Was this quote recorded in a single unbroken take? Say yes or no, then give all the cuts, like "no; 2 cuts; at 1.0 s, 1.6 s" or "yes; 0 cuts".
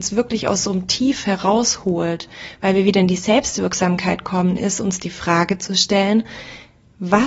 yes; 0 cuts